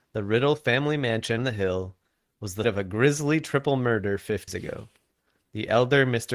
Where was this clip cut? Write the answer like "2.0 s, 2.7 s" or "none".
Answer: 1.4 s, 2.6 s, 4.5 s